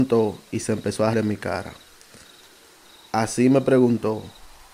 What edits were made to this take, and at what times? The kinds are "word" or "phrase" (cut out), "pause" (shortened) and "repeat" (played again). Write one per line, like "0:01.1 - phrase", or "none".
0:01.1 - word